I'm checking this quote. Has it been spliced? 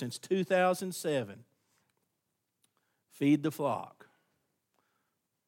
no; 0 cuts

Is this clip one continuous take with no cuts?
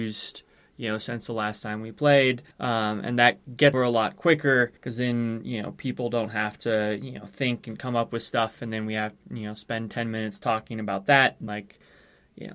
no; 4 cuts; at 2.5 s, 3.7 s, 4.8 s, 11.5 s

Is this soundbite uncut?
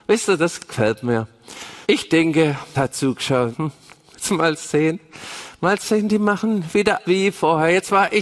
no; 4 cuts; at 1.8 s, 2.7 s, 3.5 s, 7.0 s

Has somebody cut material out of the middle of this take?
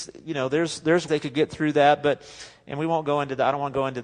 yes; 1 cut; at 1.1 s

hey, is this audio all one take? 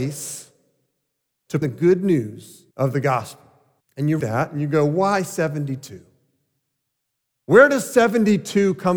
no; 4 cuts; at 1.6 s, 2.7 s, 3.8 s, 4.2 s

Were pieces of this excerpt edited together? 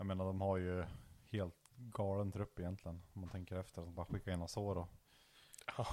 yes; 2 cuts; at 1.7 s, 3.9 s

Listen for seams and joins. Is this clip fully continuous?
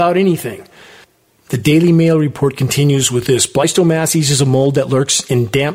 yes; 0 cuts

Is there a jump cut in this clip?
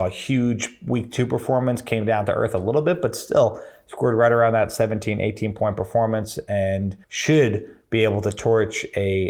yes; 1 cut; at 7.0 s

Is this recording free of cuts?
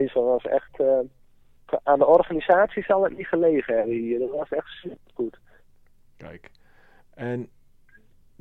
yes; 0 cuts

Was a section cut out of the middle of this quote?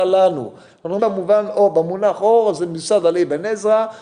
yes; 1 cut; at 1.0 s

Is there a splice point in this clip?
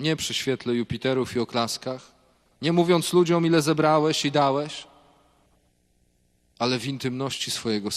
no; 0 cuts

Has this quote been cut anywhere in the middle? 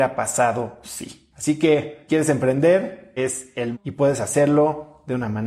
yes; 4 cuts; at 1.3 s, 2.1 s, 3.2 s, 3.7 s

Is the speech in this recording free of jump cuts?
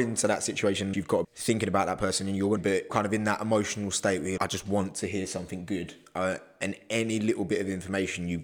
no; 5 cuts; at 0.9 s, 1.2 s, 2.6 s, 2.9 s, 4.4 s

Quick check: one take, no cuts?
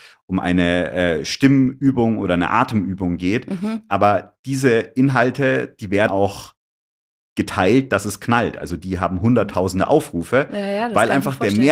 no; 1 cut; at 6.1 s

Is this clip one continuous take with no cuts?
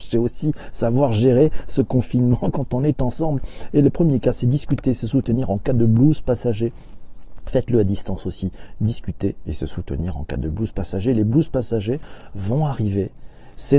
yes; 0 cuts

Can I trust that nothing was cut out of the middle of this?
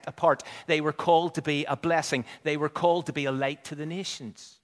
yes; 0 cuts

